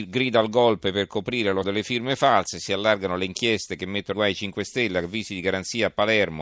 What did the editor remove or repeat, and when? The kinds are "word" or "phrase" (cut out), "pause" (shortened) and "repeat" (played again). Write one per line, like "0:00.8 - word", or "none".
0:01.6 - word
0:04.1 - word